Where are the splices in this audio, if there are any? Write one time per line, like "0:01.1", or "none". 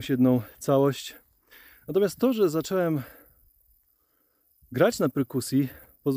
none